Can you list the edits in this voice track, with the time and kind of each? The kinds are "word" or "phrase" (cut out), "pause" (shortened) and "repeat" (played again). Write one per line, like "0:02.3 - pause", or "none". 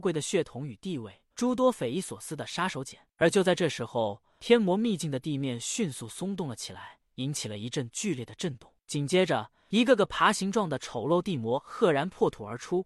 0:01.3 - phrase